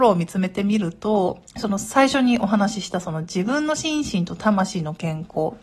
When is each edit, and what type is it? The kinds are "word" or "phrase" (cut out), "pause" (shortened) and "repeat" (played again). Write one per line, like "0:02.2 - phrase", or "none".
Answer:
0:01.5 - pause